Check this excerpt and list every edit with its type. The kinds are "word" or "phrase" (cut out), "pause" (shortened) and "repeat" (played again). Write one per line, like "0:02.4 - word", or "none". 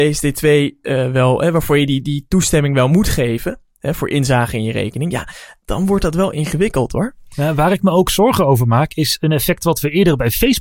none